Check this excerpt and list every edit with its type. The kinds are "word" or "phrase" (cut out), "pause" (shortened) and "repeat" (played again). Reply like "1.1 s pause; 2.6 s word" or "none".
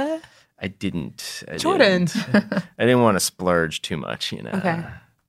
none